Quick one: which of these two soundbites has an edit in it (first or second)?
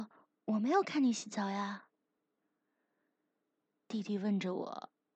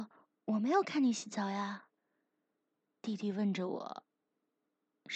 second